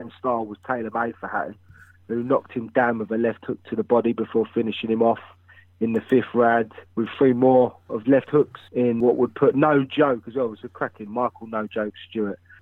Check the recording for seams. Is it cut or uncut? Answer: cut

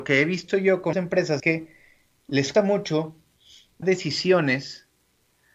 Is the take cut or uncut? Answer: cut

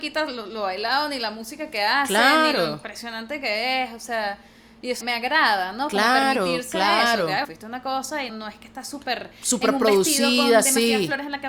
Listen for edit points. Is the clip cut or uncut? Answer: cut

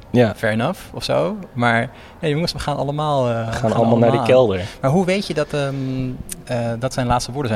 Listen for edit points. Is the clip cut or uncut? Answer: uncut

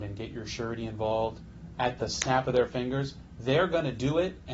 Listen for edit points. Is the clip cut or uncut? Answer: cut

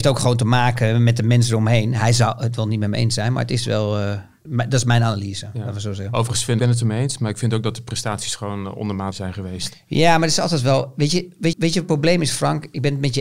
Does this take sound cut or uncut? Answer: cut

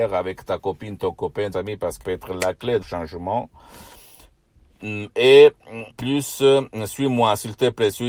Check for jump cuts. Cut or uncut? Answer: cut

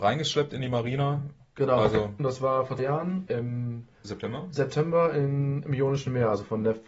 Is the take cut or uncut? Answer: cut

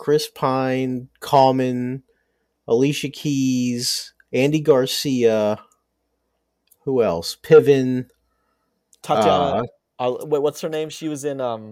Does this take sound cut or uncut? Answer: uncut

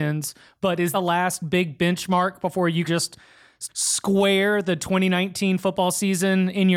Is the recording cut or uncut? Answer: cut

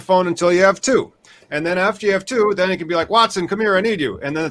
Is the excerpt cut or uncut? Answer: uncut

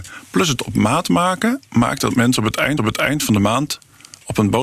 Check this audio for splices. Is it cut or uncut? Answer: cut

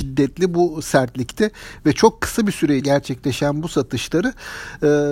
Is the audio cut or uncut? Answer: cut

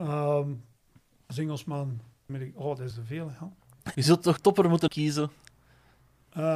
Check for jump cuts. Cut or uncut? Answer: cut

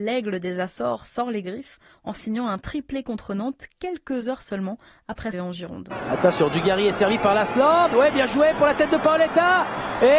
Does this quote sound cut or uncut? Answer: cut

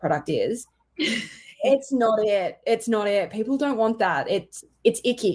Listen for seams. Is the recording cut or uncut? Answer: uncut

